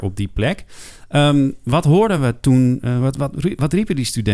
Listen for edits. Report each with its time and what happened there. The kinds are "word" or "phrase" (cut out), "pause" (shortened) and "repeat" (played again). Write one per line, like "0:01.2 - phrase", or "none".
none